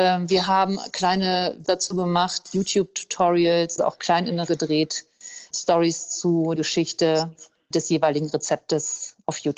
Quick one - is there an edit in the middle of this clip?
yes; 6 cuts; at 1.6 s, 3.8 s, 4.5 s, 5.5 s, 6.6 s, 7.7 s

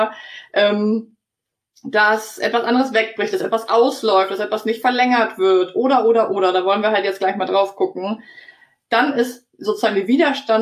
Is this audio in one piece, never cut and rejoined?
yes; 0 cuts

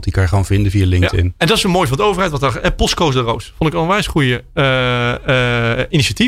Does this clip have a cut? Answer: no; 0 cuts

